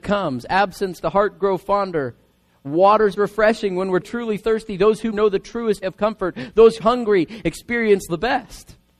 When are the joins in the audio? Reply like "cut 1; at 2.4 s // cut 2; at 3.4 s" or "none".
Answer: cut 1; at 1.0 s // cut 2; at 3.1 s // cut 3; at 4.0 s // cut 4; at 5.1 s // cut 5; at 5.8 s // cut 6; at 6.8 s // cut 7; at 8.1 s